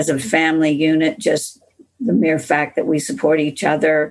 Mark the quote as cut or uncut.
uncut